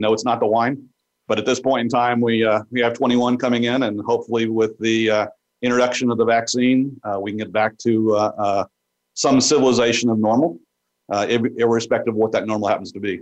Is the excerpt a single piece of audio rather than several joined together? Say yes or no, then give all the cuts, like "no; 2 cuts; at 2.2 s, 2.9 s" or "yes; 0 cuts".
yes; 0 cuts